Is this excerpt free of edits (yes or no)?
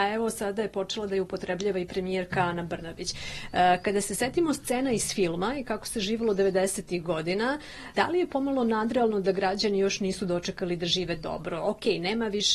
yes